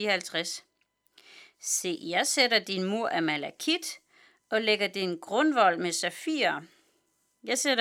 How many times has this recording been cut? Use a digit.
0